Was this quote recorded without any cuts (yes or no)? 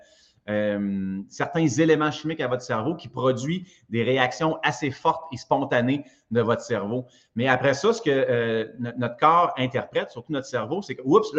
yes